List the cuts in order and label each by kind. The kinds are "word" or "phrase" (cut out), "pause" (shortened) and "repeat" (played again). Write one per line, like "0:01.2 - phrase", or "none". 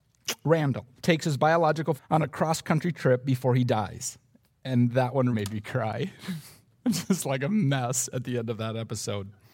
0:01.0 - pause
0:02.0 - phrase
0:05.3 - word